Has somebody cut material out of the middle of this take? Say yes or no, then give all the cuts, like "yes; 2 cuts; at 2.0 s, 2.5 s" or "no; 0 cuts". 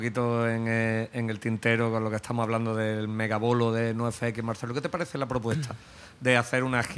no; 0 cuts